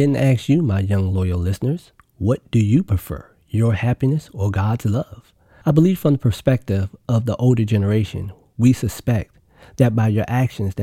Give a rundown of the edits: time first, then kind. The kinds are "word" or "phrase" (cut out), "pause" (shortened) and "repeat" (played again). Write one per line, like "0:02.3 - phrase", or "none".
none